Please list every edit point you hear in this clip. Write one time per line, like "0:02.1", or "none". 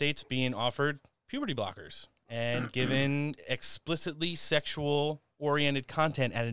none